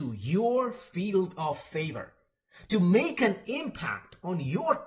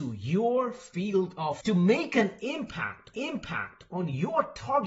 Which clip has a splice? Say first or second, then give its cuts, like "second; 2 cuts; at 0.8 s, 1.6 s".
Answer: second; 2 cuts; at 1.6 s, 3.1 s